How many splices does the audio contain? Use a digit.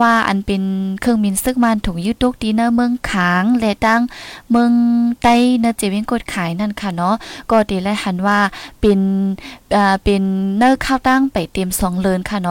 1